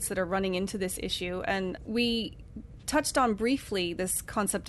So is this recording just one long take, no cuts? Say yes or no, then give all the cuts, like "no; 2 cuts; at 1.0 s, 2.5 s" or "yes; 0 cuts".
no; 1 cut; at 1.8 s